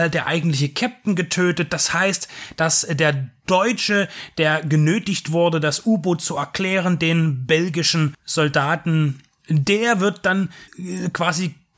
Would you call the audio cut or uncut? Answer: cut